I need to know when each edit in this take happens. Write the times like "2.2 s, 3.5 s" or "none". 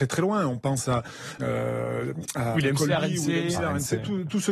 1.4 s, 2.5 s

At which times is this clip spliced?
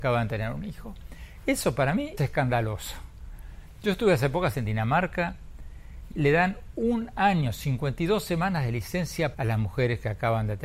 2.2 s, 4.5 s, 6.1 s, 9.3 s

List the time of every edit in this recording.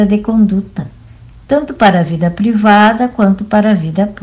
none

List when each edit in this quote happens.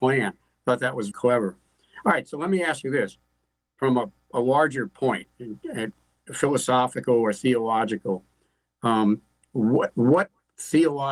1.1 s

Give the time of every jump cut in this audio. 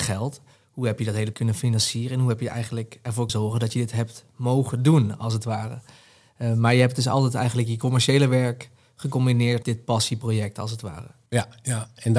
1.3 s, 3.3 s, 9.6 s

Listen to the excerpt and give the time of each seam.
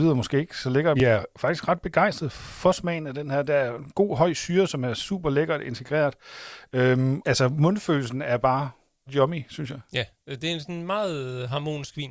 1.0 s, 7.2 s, 9.1 s

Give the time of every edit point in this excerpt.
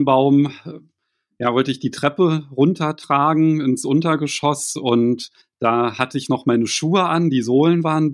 5.4 s

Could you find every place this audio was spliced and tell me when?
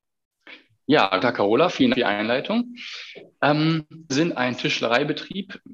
1.2 s, 1.9 s, 4.1 s

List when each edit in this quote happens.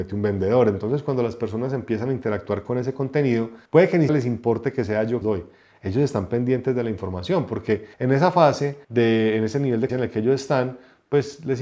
3.7 s, 4.1 s, 5.2 s, 7.9 s, 8.8 s, 9.9 s

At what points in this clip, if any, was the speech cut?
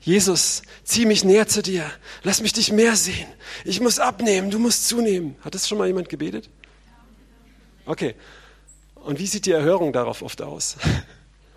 none

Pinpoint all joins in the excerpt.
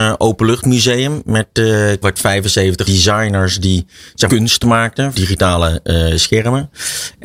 2.0 s, 2.8 s, 4.3 s, 5.1 s

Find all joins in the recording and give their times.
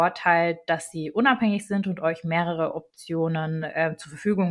none

